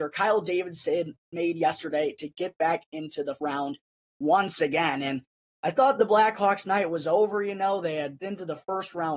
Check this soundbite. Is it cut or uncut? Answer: cut